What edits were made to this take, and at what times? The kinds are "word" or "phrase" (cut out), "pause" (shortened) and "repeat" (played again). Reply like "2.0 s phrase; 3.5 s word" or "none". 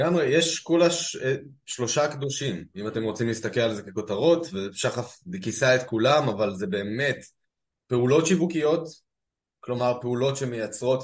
none